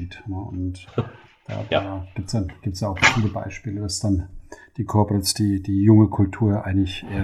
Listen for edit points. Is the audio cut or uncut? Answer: uncut